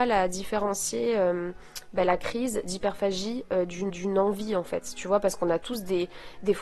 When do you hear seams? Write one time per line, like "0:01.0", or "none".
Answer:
0:03.9